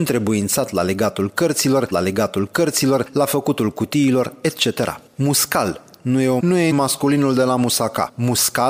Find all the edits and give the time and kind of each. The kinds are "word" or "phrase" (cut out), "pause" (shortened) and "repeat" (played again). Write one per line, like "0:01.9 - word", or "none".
0:01.9 - repeat
0:05.1 - pause
0:06.4 - word
0:06.7 - word

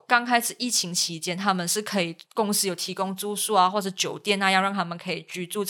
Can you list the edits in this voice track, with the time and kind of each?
0:02.2 - pause

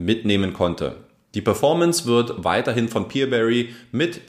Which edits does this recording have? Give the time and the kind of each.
none

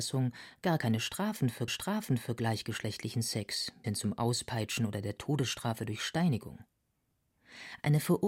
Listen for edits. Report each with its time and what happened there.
0:01.7 - repeat
0:03.8 - word

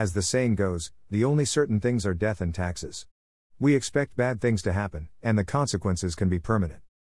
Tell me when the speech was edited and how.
none

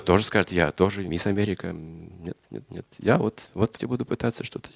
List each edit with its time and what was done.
0:01.1 - word
0:02.4 - pause
0:03.5 - pause
0:03.8 - phrase

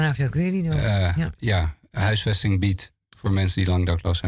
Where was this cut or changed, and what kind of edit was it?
none

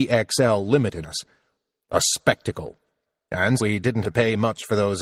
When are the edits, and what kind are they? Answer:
0:01.0 - word
0:03.6 - word
0:04.0 - word

